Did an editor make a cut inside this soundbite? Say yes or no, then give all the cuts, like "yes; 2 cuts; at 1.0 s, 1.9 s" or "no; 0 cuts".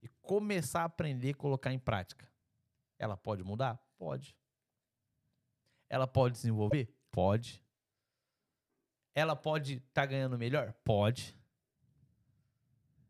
no; 0 cuts